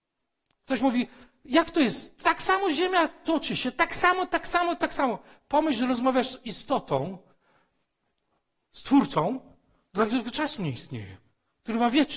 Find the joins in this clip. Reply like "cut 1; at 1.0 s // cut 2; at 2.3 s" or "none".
none